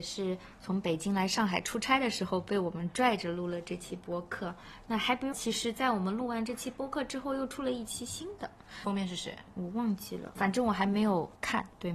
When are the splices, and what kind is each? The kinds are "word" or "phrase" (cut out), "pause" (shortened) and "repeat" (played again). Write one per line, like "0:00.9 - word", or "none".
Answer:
0:05.3 - word
0:08.8 - word